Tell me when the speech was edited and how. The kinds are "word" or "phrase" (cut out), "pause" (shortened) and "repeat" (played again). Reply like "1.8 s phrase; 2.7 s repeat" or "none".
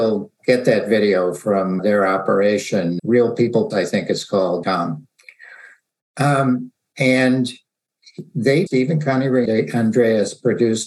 1.8 s word; 3.0 s word; 3.7 s word; 4.6 s word; 8.7 s word; 9.4 s word